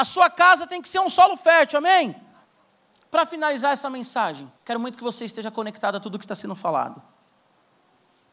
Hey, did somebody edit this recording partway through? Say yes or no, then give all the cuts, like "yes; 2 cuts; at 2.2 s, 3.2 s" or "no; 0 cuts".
yes; 2 cuts; at 2.4 s, 4.6 s